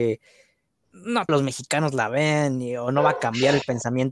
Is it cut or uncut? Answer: cut